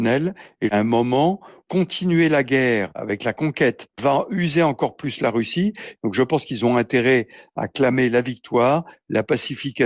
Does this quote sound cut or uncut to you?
uncut